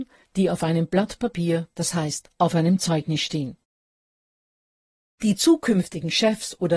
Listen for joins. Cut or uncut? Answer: uncut